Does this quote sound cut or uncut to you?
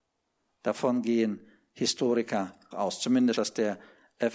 cut